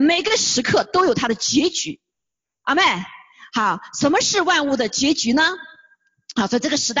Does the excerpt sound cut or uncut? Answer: uncut